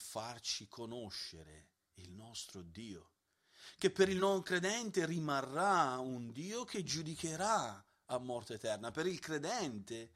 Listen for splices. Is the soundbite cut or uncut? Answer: uncut